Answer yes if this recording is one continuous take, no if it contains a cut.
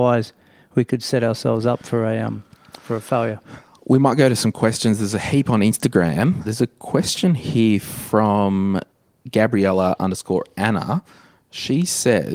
yes